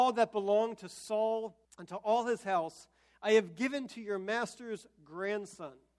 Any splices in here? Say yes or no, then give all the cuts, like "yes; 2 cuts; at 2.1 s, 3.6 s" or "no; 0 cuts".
yes; 1 cut; at 1.6 s